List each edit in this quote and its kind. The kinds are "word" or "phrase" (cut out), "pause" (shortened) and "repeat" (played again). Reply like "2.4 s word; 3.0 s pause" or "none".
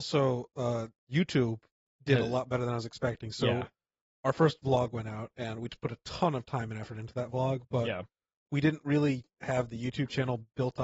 none